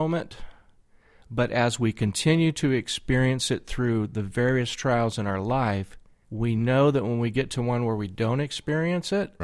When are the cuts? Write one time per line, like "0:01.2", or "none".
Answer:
0:06.2